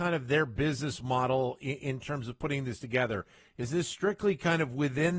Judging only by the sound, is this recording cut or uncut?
uncut